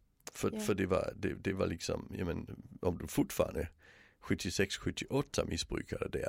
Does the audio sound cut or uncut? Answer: uncut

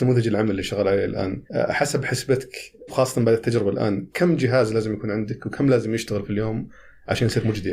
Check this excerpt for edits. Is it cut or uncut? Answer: cut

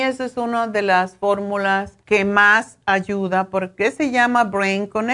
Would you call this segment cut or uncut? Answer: cut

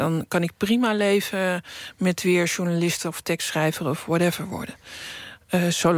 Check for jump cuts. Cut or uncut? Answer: uncut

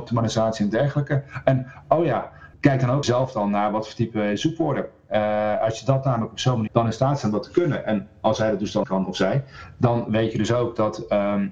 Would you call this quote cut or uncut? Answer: cut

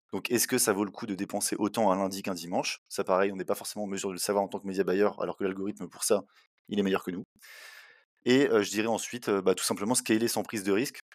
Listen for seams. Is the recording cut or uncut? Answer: uncut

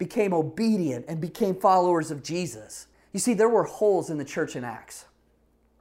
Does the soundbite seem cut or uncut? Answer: cut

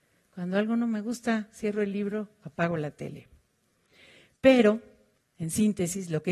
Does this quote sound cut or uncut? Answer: uncut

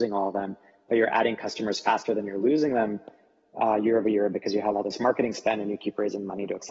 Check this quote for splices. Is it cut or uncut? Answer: uncut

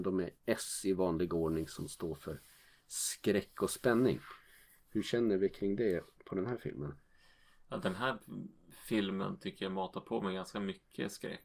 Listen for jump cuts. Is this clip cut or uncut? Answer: uncut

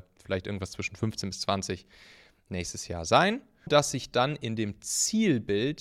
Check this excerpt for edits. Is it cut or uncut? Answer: cut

